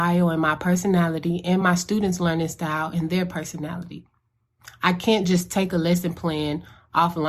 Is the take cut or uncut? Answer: uncut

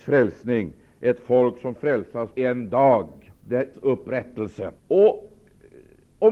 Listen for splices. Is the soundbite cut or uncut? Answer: cut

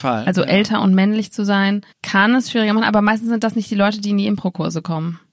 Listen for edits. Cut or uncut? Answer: cut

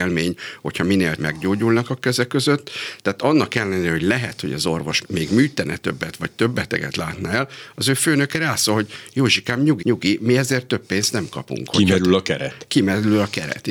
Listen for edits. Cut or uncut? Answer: cut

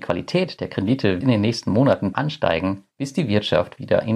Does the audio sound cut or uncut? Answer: cut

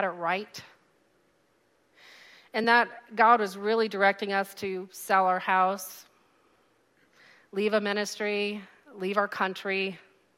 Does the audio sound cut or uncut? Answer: uncut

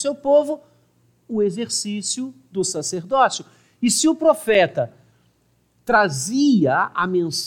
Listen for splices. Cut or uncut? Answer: uncut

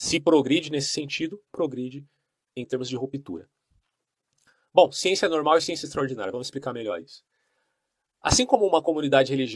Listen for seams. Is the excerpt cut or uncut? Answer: uncut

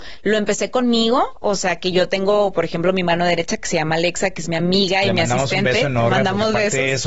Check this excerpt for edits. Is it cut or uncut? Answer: uncut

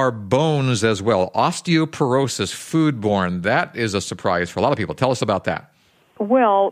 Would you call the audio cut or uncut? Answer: uncut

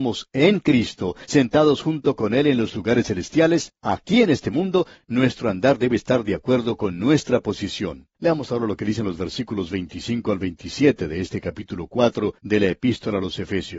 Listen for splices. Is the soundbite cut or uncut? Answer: cut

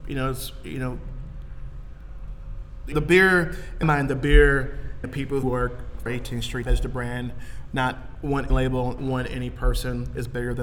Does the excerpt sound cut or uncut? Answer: cut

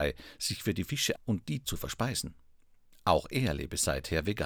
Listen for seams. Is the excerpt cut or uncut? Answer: cut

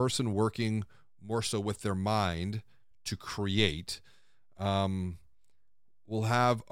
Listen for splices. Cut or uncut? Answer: uncut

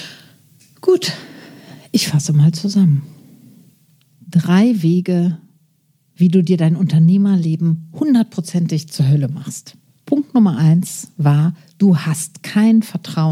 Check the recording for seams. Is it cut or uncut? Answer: uncut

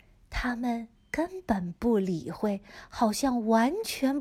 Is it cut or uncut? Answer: cut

